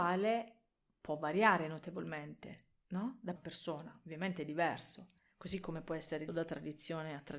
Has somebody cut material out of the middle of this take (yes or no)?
yes